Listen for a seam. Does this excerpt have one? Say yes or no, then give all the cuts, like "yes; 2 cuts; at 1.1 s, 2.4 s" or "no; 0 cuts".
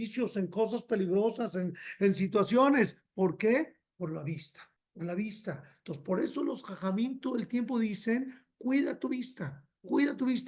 yes; 1 cut; at 4.8 s